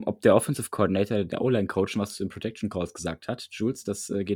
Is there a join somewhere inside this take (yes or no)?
no